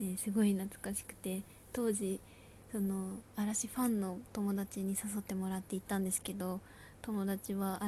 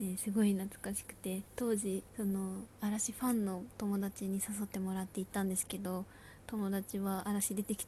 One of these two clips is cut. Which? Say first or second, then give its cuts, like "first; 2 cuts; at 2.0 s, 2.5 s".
second; 2 cuts; at 1.5 s, 2.1 s